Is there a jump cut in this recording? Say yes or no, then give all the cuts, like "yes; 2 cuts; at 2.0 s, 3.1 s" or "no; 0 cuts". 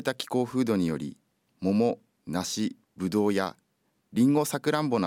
no; 0 cuts